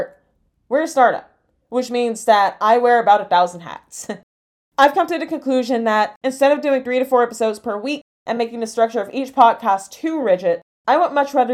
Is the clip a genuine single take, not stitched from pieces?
yes; 0 cuts

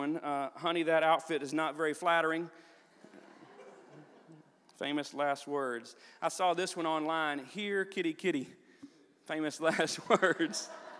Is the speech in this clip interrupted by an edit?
no; 0 cuts

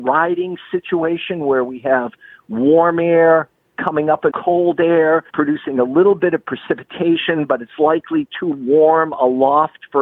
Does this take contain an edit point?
yes; 2 cuts; at 4.3 s, 5.3 s

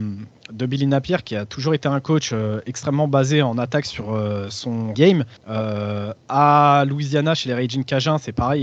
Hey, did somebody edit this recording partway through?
yes; 2 cuts; at 4.9 s, 5.4 s

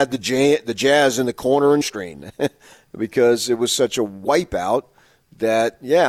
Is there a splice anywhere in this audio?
yes; 1 cut; at 1.8 s

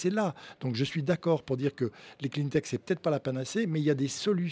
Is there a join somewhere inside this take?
no; 0 cuts

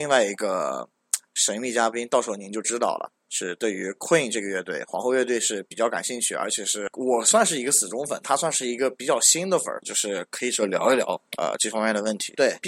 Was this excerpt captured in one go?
yes; 0 cuts

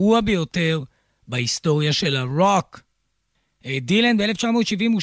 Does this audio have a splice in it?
no; 0 cuts

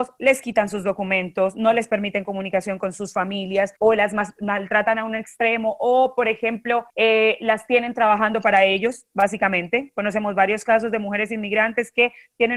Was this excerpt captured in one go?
no; 2 cuts; at 3.8 s, 6.9 s

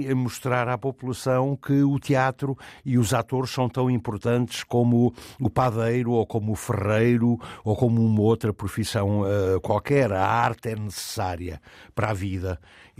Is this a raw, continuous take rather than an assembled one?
yes; 0 cuts

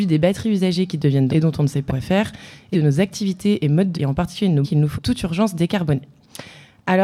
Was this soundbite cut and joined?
yes; 6 cuts; at 1.3 s, 1.9 s, 2.7 s, 3.9 s, 4.6 s, 4.9 s

